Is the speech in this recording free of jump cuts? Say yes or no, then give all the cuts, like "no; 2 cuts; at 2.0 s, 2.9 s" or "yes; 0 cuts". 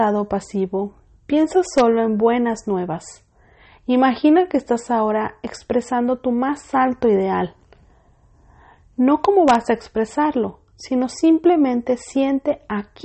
yes; 0 cuts